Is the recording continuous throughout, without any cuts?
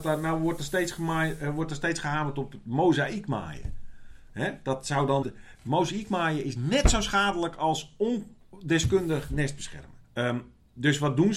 no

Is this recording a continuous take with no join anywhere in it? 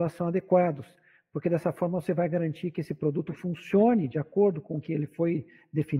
yes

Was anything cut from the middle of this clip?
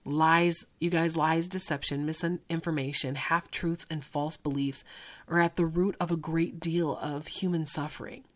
no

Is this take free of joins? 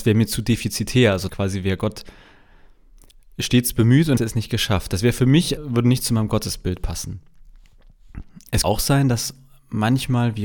no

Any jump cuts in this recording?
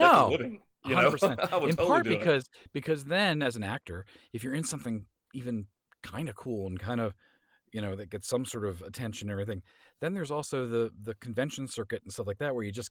no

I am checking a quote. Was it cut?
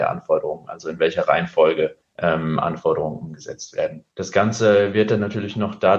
yes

